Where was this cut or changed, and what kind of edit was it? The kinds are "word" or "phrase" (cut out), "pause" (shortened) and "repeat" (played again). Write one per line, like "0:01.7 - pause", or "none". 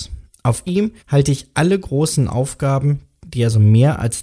0:01.0 - pause